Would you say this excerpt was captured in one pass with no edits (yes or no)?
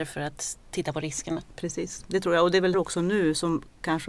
no